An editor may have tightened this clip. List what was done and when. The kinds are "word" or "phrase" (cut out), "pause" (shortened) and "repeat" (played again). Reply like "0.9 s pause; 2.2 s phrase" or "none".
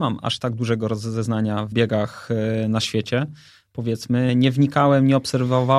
1.7 s word; 4.3 s word